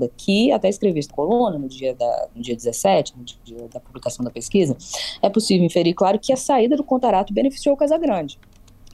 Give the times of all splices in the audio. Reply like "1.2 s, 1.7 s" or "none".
1.1 s